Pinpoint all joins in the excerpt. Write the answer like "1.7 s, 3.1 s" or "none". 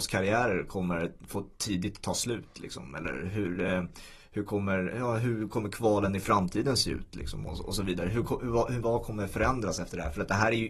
none